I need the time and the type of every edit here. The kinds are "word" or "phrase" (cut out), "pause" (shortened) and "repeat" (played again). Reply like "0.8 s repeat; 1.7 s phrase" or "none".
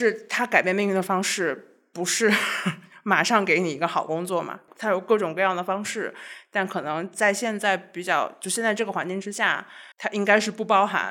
9.9 s pause